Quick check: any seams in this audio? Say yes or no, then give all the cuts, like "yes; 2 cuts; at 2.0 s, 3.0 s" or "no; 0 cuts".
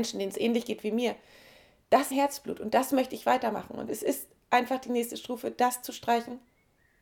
yes; 2 cuts; at 2.1 s, 3.9 s